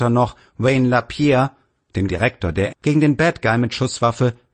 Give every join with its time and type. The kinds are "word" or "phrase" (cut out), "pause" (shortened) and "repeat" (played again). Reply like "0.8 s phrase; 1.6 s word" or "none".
2.1 s word; 2.7 s word